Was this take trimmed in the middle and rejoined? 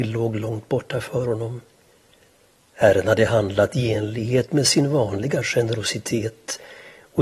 no; 0 cuts

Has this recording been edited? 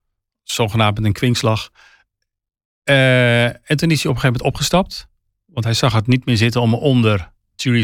no; 0 cuts

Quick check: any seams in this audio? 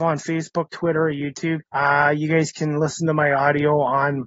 yes; 1 cut; at 1.7 s

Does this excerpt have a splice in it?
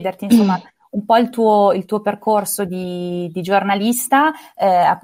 no; 0 cuts

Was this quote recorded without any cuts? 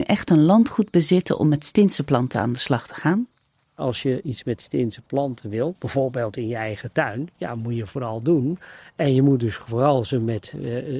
yes; 0 cuts

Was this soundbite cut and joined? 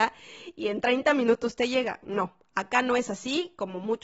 no; 0 cuts

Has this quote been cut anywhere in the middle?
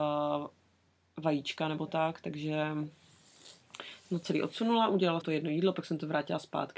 yes; 1 cut; at 5.2 s

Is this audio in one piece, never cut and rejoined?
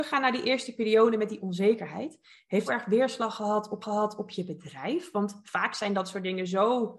no; 2 cuts; at 2.7 s, 3.8 s

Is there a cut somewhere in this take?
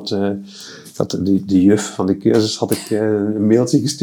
no; 0 cuts

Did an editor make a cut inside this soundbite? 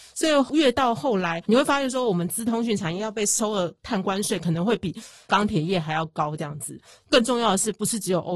no; 0 cuts

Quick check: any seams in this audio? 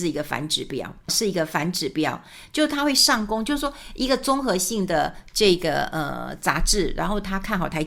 yes; 1 cut; at 1.1 s

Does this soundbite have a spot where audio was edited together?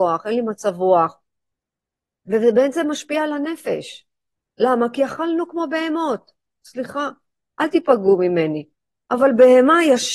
no; 0 cuts

